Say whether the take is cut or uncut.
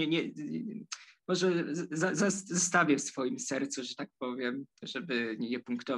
cut